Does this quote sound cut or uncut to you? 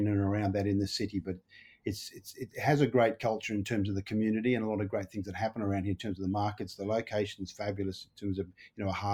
uncut